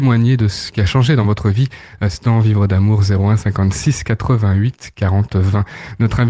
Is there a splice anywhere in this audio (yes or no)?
no